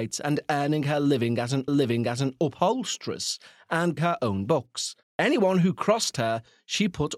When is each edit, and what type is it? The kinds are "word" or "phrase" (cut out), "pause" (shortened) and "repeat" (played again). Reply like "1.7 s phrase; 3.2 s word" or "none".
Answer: 1.7 s repeat; 4.0 s word; 5.0 s pause